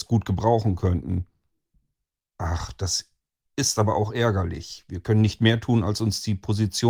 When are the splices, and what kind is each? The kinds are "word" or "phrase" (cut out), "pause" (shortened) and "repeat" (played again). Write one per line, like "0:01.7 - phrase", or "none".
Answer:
none